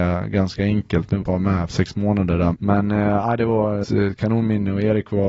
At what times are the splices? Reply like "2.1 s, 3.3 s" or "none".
1.2 s, 1.7 s, 2.5 s, 3.8 s

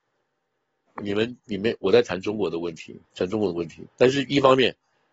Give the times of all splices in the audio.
3.0 s, 3.9 s

